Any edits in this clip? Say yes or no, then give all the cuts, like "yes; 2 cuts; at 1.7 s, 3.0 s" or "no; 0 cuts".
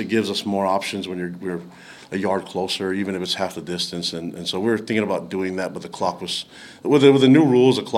no; 0 cuts